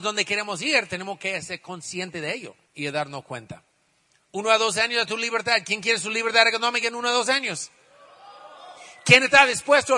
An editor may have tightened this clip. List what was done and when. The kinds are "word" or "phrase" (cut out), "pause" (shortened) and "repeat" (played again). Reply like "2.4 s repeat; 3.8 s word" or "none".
2.6 s pause